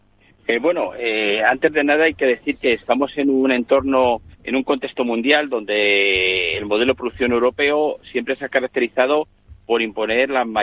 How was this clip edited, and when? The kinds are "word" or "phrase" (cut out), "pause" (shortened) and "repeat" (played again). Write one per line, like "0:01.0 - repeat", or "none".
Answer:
0:04.3 - pause